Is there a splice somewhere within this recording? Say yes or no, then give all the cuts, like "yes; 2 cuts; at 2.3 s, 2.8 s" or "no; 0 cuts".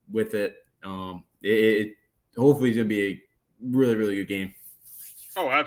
no; 0 cuts